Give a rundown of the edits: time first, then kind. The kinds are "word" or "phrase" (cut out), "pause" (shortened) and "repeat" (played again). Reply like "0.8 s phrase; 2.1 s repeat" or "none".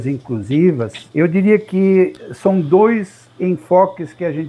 1.1 s pause

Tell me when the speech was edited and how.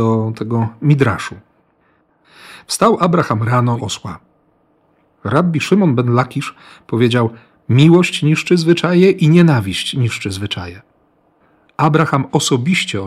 3.8 s phrase

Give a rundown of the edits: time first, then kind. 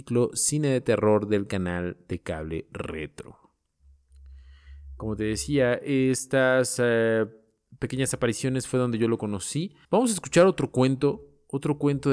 9.8 s pause

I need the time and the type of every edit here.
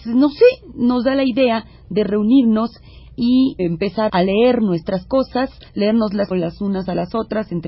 3.6 s word; 4.1 s word; 5.7 s pause; 6.3 s word

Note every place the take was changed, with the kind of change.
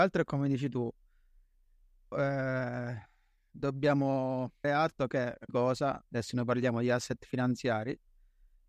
2.1 s word; 4.6 s word; 5.5 s word

